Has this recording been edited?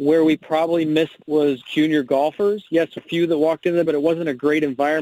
yes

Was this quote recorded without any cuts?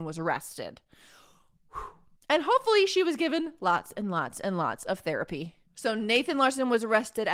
yes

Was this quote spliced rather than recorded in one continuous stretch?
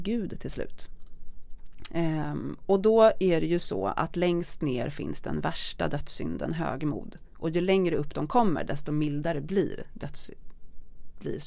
no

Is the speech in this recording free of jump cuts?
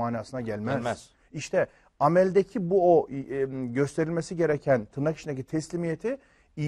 yes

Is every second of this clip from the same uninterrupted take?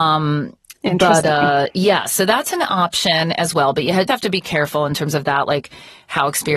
no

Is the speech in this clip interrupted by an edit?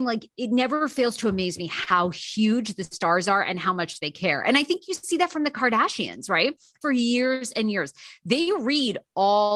yes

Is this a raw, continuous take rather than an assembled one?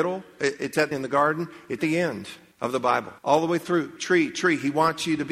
no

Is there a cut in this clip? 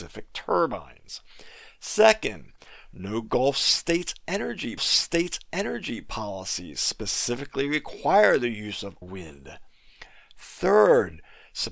yes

